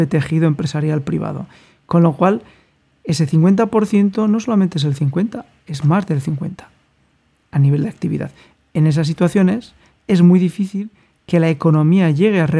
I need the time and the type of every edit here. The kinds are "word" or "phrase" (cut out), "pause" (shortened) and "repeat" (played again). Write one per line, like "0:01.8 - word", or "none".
none